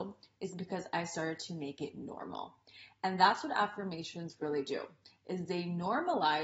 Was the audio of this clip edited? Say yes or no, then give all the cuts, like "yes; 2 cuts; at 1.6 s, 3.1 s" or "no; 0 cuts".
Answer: no; 0 cuts